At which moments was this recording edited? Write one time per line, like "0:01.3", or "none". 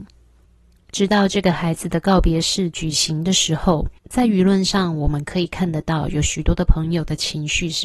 0:04.0